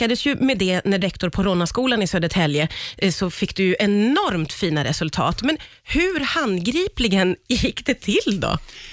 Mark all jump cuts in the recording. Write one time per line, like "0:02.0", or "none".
0:01.0